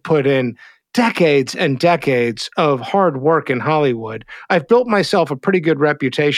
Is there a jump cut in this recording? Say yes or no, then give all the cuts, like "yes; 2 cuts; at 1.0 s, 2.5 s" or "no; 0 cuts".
no; 0 cuts